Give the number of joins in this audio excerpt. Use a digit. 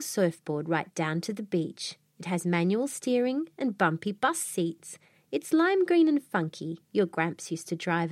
0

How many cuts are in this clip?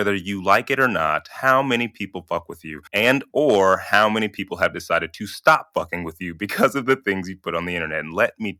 1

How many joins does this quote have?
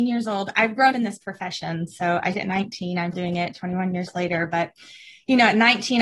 3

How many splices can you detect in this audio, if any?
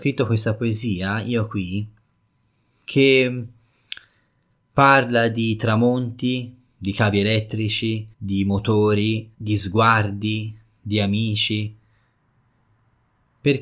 3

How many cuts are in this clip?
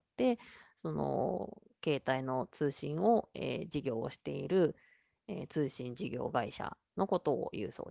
0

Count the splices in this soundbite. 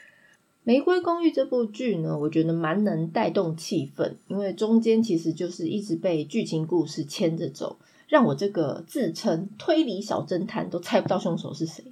0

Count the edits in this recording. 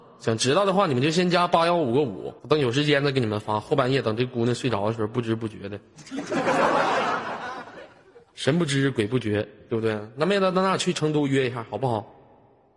1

